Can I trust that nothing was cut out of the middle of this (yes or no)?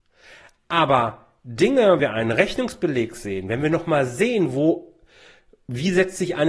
no